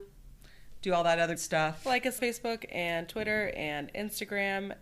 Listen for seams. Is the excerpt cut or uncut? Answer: cut